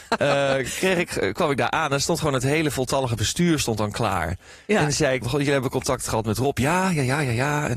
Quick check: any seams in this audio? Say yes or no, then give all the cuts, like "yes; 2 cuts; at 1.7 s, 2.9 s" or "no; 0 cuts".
yes; 1 cut; at 5.2 s